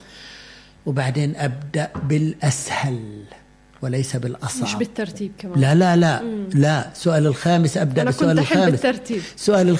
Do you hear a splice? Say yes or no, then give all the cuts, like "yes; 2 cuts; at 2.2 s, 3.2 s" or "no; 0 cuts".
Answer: no; 0 cuts